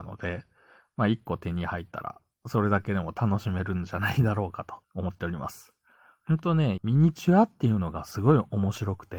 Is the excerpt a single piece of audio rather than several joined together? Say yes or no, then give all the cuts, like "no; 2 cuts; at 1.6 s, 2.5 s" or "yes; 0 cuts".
no; 2 cuts; at 4.8 s, 6.8 s